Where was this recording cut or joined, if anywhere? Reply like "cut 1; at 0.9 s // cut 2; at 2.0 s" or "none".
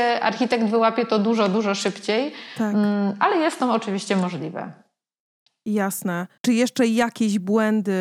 cut 1; at 6.4 s